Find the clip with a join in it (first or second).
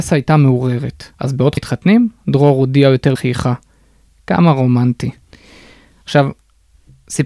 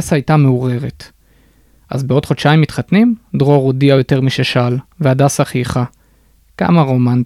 first